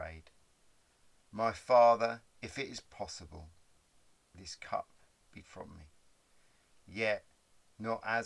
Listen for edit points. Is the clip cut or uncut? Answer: cut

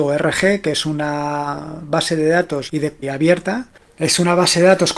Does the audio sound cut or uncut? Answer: cut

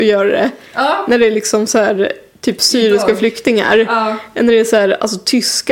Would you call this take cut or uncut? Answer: uncut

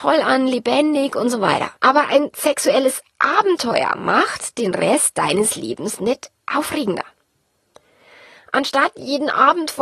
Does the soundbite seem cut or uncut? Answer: cut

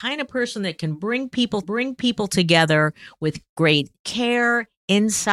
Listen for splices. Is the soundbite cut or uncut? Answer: cut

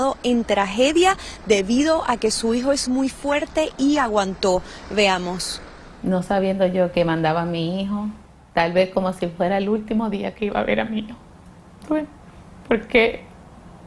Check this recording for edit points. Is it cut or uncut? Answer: uncut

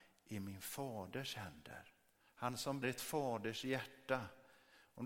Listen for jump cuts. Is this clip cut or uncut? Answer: cut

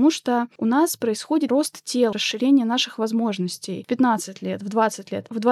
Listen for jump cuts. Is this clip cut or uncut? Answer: cut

